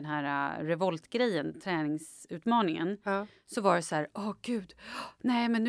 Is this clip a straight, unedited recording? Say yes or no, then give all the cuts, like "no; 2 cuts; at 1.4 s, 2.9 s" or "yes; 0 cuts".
yes; 0 cuts